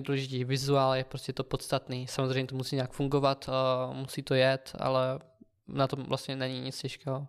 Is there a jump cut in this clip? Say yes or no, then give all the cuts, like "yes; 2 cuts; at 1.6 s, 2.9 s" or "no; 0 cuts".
no; 0 cuts